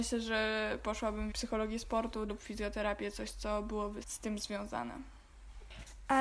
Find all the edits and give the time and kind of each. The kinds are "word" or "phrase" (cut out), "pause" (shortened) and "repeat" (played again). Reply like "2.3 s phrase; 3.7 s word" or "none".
1.3 s word; 2.3 s word; 4.0 s word